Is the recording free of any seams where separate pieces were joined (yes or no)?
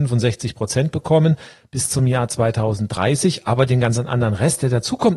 yes